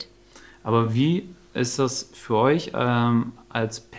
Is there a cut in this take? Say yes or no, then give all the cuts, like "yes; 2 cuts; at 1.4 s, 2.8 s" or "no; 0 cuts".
no; 0 cuts